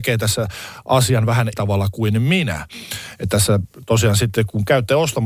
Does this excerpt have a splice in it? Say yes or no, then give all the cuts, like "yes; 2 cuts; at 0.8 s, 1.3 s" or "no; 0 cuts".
yes; 1 cut; at 1.5 s